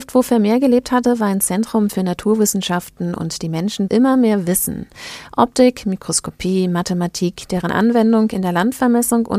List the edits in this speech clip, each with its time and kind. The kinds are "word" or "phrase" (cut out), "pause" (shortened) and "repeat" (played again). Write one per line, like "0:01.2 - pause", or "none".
0:03.9 - phrase